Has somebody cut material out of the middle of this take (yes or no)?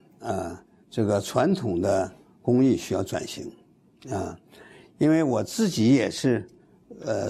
no